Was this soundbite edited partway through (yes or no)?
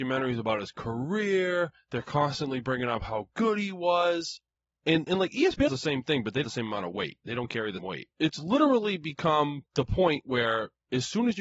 yes